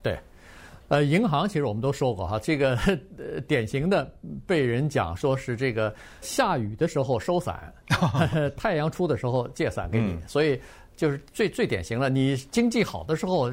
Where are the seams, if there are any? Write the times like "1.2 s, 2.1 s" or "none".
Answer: 6.2 s